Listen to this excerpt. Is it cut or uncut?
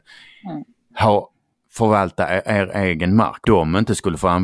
cut